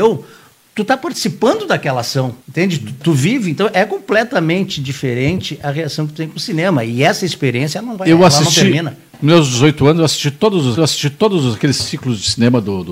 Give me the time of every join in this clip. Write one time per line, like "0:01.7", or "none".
0:02.4
0:10.8